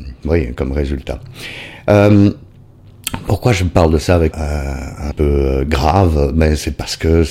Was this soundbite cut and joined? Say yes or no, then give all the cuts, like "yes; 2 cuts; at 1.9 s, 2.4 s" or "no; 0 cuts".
yes; 2 cuts; at 4.3 s, 5.1 s